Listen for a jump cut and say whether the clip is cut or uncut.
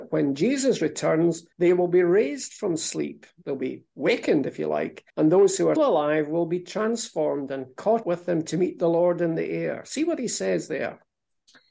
cut